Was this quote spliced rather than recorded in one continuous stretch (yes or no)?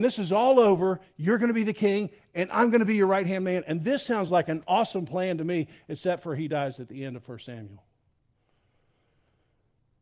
no